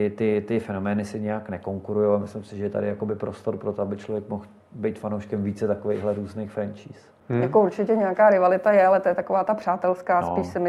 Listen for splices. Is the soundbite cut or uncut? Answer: uncut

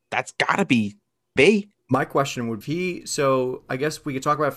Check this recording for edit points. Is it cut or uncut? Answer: cut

